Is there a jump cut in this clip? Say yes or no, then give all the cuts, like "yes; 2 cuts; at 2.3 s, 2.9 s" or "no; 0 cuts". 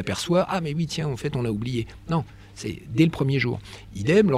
no; 0 cuts